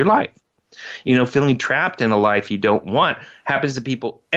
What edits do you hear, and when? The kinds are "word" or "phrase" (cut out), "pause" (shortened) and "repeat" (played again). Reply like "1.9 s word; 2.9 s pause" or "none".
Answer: none